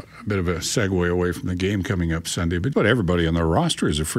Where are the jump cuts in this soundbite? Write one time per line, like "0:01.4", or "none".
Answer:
0:02.7